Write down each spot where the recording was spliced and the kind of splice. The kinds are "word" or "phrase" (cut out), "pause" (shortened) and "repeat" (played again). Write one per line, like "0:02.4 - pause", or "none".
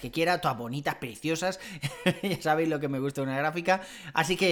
none